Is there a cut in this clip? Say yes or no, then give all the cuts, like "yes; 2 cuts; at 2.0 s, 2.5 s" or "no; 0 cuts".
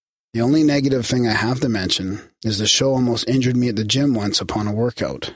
no; 0 cuts